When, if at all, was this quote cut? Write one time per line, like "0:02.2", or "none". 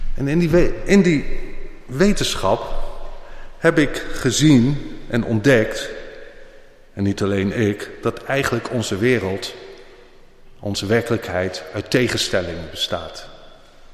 none